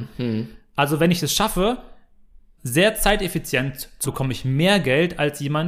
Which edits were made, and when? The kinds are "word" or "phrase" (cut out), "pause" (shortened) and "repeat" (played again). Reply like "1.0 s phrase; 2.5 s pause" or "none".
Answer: 2.6 s word; 4.0 s word